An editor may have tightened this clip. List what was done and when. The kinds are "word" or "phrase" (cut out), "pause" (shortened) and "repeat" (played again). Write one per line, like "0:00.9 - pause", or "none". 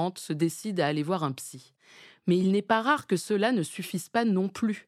none